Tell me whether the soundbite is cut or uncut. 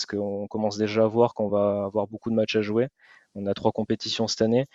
uncut